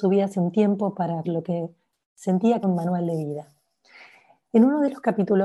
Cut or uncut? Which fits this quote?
cut